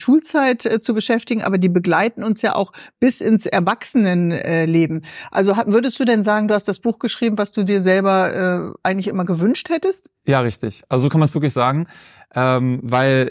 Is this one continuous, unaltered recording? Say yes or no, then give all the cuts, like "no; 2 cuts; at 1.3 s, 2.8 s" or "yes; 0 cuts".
yes; 0 cuts